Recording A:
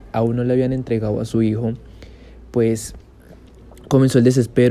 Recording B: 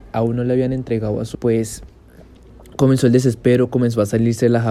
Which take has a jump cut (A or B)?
B